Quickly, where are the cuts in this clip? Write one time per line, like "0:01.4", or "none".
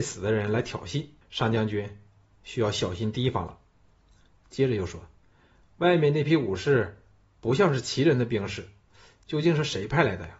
0:01.2